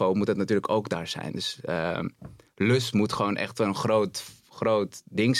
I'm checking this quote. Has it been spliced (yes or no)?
no